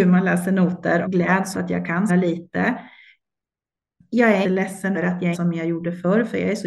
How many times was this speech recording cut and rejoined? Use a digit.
6